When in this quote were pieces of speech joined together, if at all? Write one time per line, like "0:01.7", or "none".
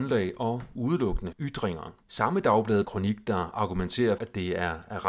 0:01.3
0:02.0
0:02.8
0:04.2